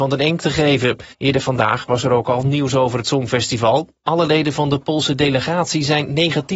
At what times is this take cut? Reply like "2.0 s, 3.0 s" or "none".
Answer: 1.1 s